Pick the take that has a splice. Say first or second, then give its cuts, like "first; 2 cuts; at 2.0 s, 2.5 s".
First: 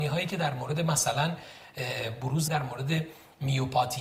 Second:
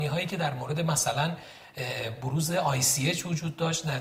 first; 1 cut; at 2.5 s